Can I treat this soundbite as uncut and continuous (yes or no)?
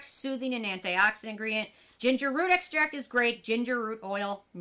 yes